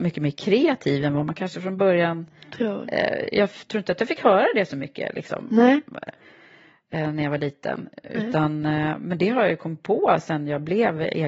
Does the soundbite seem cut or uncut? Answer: uncut